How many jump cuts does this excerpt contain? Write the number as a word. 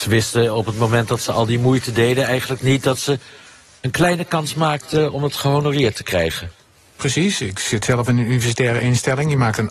zero